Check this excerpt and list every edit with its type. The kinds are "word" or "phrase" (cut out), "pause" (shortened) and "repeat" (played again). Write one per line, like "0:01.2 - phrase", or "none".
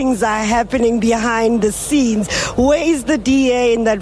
none